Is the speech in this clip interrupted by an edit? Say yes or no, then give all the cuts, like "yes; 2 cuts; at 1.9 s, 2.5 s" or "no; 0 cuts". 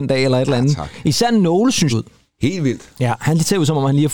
yes; 1 cut; at 1.9 s